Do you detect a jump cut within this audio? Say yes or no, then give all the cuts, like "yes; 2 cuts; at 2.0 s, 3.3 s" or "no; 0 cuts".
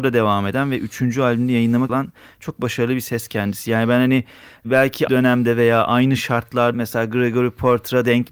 yes; 3 cuts; at 1.9 s, 5.1 s, 6.7 s